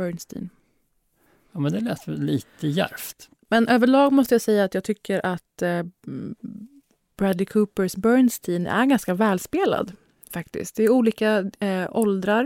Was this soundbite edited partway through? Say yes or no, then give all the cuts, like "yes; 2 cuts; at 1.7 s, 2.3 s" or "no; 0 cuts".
no; 0 cuts